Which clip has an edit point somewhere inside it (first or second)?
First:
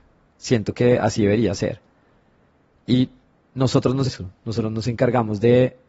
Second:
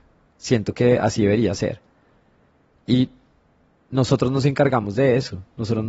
first